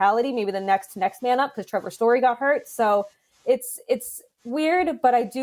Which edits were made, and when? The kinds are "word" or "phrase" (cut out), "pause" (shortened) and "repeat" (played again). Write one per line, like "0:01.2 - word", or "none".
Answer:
none